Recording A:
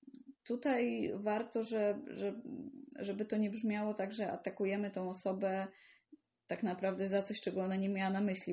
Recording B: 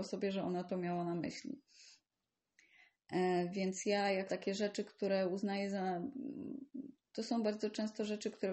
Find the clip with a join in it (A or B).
B